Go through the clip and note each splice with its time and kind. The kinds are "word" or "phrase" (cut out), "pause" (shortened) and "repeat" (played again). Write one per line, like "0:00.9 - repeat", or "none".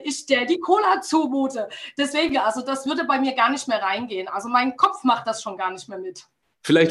none

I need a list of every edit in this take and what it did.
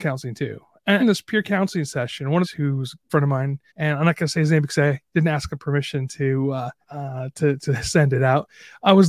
0:01.0 - phrase
0:02.4 - phrase
0:03.1 - word
0:03.7 - pause
0:06.8 - pause
0:07.6 - word

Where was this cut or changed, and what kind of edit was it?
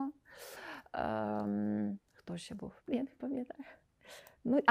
0:02.0 - pause
0:02.8 - pause

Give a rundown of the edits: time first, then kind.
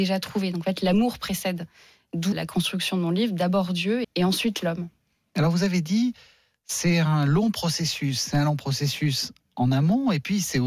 0:02.3 - word
0:04.0 - word

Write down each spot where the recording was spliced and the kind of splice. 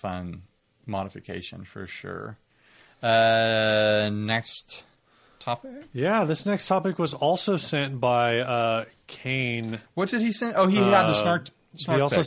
none

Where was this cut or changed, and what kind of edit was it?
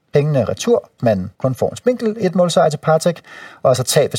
0:01.0 - word
0:01.3 - pause

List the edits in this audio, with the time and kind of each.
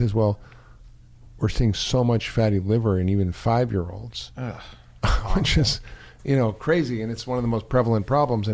none

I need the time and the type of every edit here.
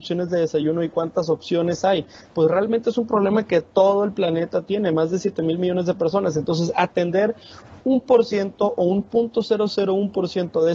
none

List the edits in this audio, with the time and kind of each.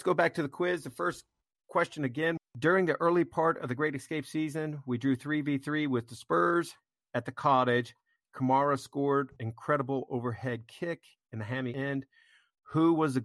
0:02.4 - word
0:09.4 - word

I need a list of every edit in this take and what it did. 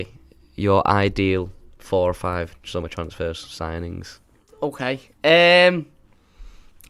none

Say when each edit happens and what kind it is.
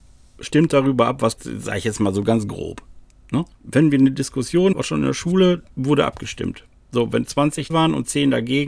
0:01.4 - phrase
0:03.5 - pause
0:04.7 - phrase
0:07.7 - word

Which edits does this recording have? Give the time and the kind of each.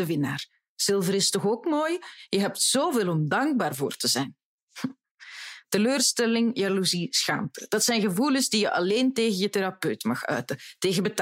none

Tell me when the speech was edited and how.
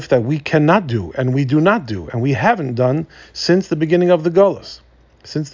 none

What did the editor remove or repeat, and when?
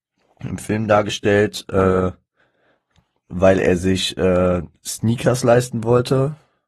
none

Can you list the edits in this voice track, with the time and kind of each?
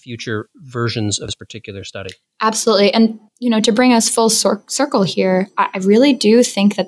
0:03.3 - pause

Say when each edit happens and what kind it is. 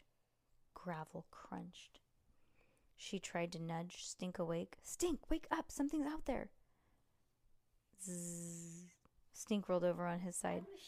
none

